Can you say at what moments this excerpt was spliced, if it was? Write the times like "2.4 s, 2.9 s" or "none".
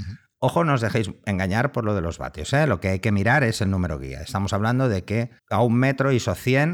5.4 s